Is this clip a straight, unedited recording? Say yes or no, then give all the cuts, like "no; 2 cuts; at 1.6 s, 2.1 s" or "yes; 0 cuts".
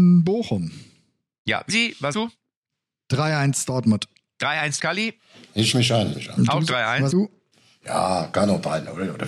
no; 6 cuts; at 1.7 s, 2.1 s, 4.8 s, 5.7 s, 6.1 s, 7.1 s